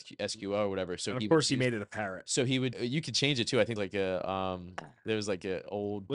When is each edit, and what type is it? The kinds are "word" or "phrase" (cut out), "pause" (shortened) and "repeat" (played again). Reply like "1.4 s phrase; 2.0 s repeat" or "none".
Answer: 2.7 s word; 3.8 s phrase